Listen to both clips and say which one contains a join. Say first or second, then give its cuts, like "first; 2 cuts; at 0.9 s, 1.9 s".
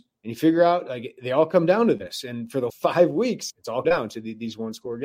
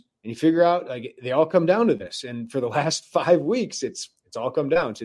first; 3 cuts; at 2.7 s, 3.5 s, 3.8 s